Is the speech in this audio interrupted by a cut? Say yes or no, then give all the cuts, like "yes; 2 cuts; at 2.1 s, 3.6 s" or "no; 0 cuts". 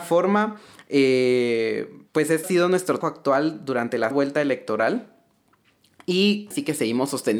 yes; 5 cuts; at 2.1 s, 2.4 s, 3.0 s, 4.1 s, 6.5 s